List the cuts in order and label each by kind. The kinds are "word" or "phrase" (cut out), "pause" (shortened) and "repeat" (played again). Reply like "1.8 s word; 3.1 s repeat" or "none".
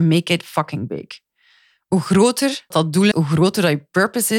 2.7 s word; 3.1 s word